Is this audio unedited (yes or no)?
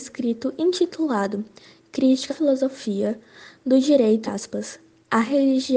no